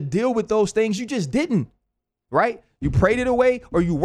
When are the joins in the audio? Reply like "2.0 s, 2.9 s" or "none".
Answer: none